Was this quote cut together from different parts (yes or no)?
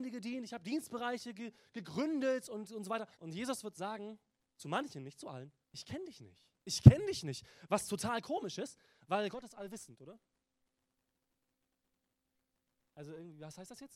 yes